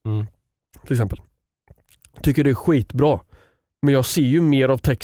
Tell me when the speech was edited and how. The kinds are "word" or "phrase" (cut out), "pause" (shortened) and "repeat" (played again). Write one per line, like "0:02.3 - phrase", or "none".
none